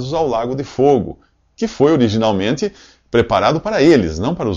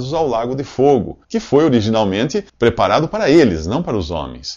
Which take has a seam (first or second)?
second